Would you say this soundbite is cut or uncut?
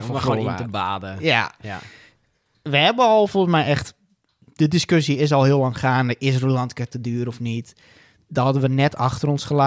uncut